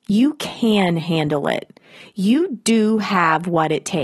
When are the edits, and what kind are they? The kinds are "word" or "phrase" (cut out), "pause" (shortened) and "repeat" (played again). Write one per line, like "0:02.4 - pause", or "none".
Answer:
none